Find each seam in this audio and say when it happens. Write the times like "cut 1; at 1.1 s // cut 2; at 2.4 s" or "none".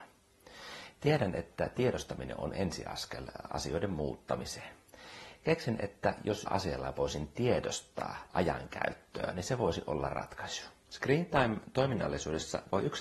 cut 1; at 6.5 s // cut 2; at 8.3 s